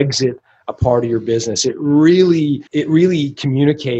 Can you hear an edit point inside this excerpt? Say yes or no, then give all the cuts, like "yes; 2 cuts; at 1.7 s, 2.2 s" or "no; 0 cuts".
yes; 1 cut; at 2.7 s